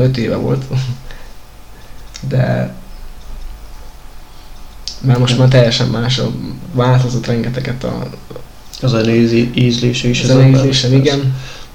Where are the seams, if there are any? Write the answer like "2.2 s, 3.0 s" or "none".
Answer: none